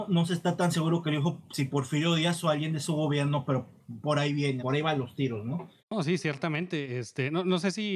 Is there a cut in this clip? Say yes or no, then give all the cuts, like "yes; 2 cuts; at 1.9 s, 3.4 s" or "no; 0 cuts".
yes; 2 cuts; at 4.6 s, 5.8 s